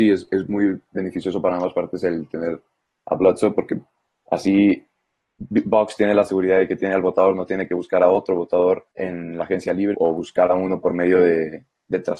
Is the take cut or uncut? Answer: cut